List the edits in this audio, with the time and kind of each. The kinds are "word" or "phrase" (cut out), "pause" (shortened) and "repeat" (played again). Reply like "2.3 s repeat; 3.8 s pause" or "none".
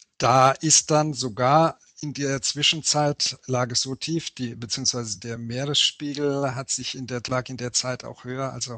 none